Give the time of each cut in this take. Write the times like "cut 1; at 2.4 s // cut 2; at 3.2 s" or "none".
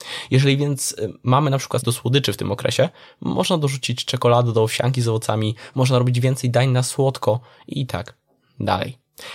cut 1; at 1.8 s